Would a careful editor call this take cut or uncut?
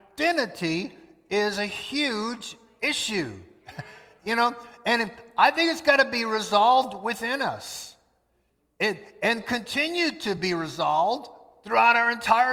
uncut